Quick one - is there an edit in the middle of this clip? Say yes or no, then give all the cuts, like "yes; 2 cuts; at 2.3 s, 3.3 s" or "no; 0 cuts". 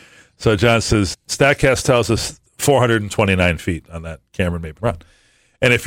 yes; 4 cuts; at 1.1 s, 2.5 s, 4.3 s, 4.8 s